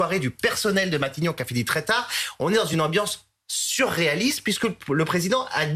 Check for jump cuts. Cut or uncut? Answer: uncut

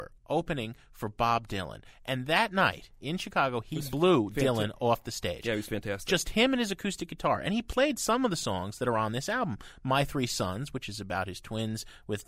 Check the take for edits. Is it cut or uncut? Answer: uncut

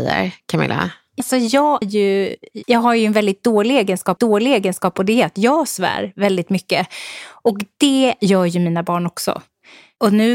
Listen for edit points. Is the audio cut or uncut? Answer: cut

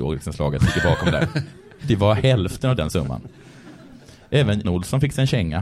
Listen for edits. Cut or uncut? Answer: cut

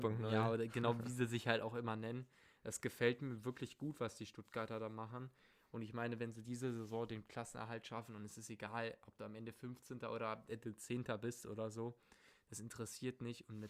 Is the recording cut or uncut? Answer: uncut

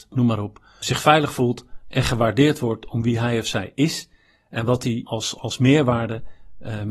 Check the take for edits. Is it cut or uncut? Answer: uncut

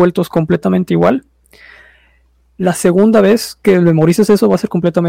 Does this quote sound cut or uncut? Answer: uncut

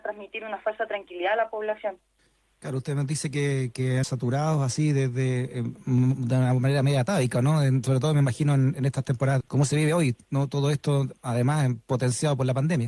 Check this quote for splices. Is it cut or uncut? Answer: cut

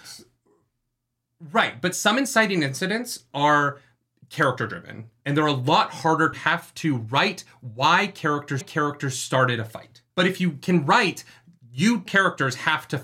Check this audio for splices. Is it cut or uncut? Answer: cut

